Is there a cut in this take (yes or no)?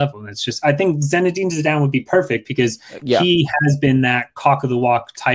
no